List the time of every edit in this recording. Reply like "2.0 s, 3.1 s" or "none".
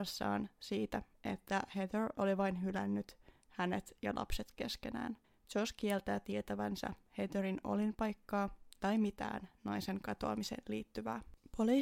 5.2 s